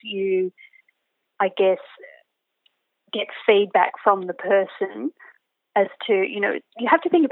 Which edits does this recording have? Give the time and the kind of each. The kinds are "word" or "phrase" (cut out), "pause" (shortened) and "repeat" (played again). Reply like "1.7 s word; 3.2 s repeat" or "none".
none